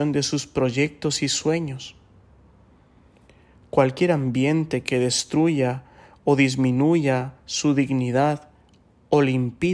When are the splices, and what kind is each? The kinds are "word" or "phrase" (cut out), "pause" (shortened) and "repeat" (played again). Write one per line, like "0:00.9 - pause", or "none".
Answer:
none